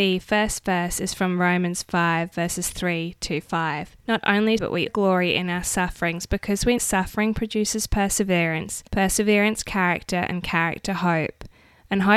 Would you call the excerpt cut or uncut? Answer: cut